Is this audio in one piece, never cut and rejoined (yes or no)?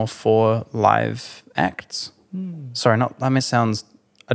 no